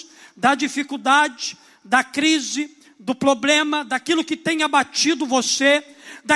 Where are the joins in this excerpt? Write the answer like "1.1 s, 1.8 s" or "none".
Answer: none